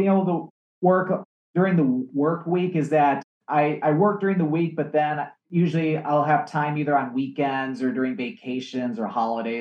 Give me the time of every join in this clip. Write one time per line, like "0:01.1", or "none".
none